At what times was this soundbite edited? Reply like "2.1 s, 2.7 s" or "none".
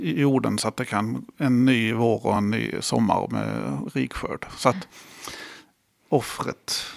none